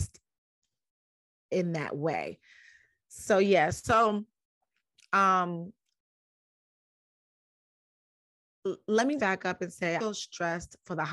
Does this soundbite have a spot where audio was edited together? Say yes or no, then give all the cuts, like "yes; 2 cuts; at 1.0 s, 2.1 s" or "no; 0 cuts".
yes; 2 cuts; at 9.2 s, 10.0 s